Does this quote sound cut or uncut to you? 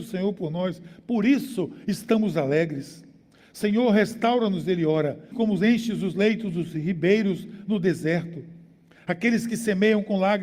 cut